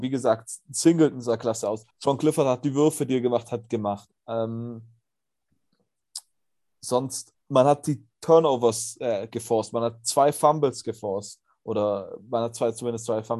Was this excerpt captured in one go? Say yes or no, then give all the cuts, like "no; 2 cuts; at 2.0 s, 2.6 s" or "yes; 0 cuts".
no; 4 cuts; at 1.9 s, 4.2 s, 7.4 s, 8.1 s